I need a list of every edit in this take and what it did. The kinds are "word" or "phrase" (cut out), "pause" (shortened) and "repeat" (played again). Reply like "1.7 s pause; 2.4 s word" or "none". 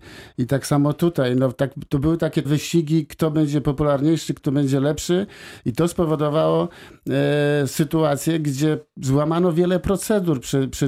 2.4 s word